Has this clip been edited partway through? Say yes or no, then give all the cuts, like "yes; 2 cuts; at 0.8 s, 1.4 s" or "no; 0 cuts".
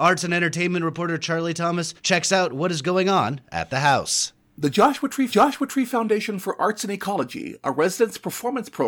yes; 3 cuts; at 2.0 s, 4.4 s, 5.3 s